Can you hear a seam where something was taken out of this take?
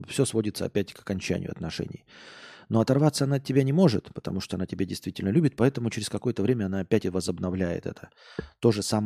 no; 0 cuts

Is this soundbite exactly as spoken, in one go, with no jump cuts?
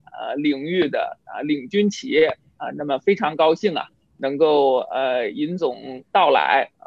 yes; 0 cuts

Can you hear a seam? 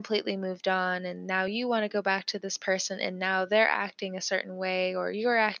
no; 0 cuts

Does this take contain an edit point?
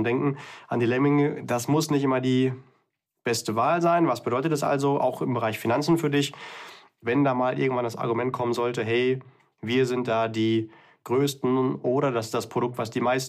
no; 0 cuts

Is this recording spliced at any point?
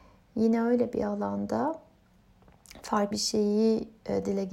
yes; 1 cut; at 3.1 s

